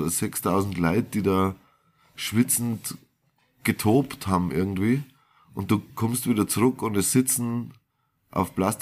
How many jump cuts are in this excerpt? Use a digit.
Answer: 0